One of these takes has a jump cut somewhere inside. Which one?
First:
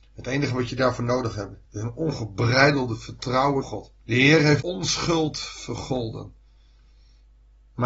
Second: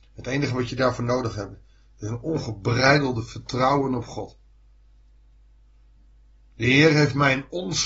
first; 4 cuts; at 1.6 s, 3.6 s, 4.0 s, 4.6 s

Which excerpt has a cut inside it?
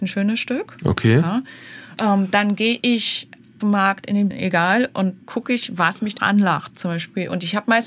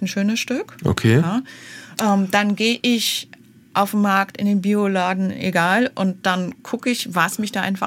first; 4 cuts; at 3.6 s, 4.3 s, 5.2 s, 6.2 s

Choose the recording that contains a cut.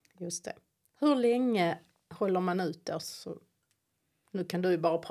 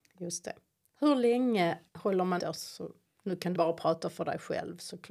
second; 4 cuts; at 1.9 s, 2.4 s, 3.1 s, 3.5 s

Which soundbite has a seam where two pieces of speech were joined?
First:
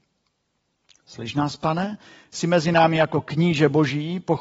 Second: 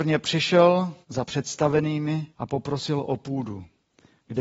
second; 2 cuts; at 1.0 s, 2.3 s

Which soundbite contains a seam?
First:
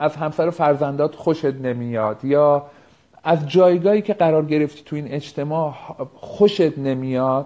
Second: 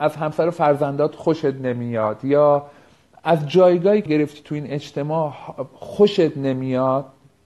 second; 1 cut; at 4.1 s

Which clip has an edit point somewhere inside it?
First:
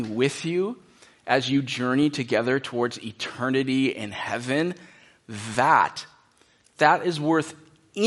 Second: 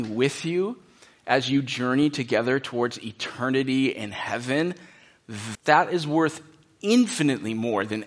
second; 1 cut; at 5.5 s

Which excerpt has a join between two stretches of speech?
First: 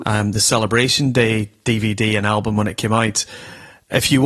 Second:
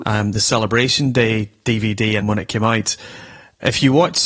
second; 1 cut; at 2.2 s

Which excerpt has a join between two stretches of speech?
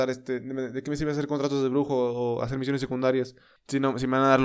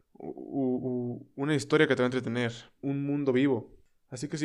second; 1 cut; at 2.8 s

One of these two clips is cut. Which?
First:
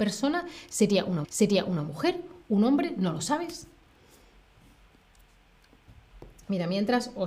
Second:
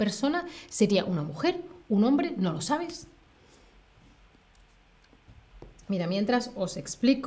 first; 1 cut; at 1.2 s

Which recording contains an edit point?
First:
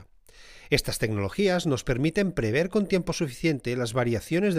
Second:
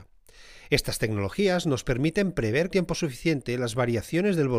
second; 1 cut; at 2.7 s

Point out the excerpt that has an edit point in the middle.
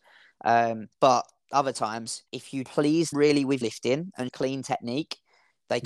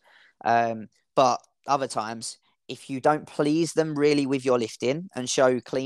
first; 6 cuts; at 0.9 s, 2.3 s, 2.7 s, 3.1 s, 3.6 s, 4.3 s

